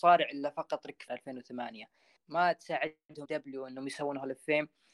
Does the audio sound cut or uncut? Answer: cut